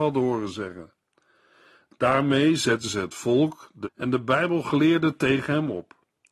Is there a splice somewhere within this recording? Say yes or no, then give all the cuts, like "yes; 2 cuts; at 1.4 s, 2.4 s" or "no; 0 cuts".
yes; 1 cut; at 3.8 s